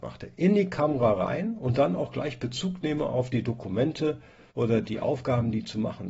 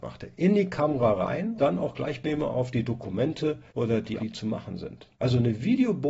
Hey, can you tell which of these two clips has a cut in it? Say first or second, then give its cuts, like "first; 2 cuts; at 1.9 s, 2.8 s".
second; 4 cuts; at 1.6 s, 2.2 s, 3.7 s, 4.2 s